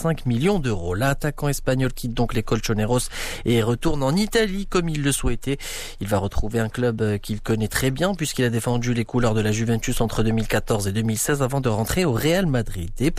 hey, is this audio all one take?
yes; 0 cuts

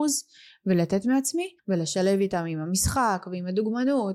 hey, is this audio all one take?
no; 1 cut; at 1.6 s

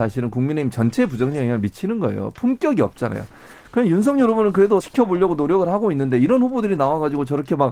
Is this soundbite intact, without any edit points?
no; 1 cut; at 4.8 s

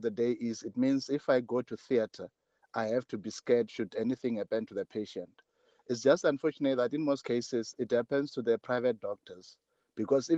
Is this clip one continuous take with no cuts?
yes; 0 cuts

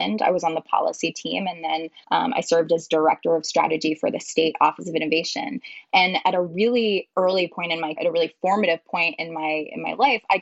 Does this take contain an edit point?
yes; 2 cuts; at 2.0 s, 8.0 s

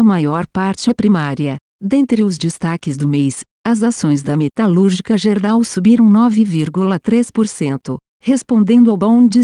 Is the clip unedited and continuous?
yes; 0 cuts

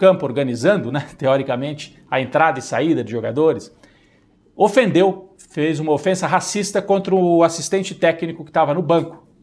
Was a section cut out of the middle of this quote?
no; 0 cuts

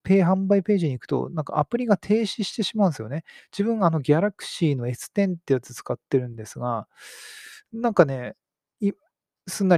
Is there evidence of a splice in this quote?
yes; 1 cut; at 3.4 s

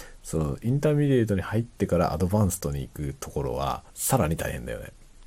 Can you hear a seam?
yes; 1 cut; at 3.9 s

